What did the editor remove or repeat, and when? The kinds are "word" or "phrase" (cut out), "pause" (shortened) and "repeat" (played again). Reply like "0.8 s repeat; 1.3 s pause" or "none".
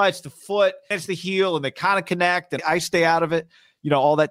0.9 s word; 2.6 s word